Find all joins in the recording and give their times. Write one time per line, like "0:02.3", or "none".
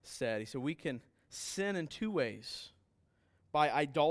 none